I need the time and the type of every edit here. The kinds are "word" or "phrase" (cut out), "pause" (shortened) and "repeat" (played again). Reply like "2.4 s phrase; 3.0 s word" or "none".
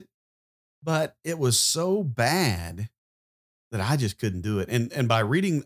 none